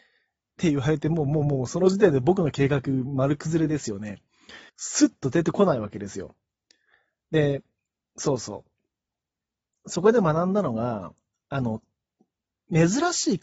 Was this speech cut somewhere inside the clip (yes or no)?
yes